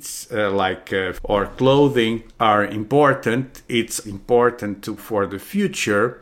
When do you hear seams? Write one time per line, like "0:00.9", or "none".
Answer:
0:01.2
0:02.3
0:04.0
0:05.0